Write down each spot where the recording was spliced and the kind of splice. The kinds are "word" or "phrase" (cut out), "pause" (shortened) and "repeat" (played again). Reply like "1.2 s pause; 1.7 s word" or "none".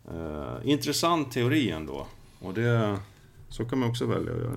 none